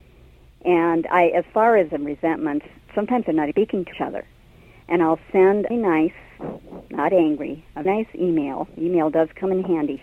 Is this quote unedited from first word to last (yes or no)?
no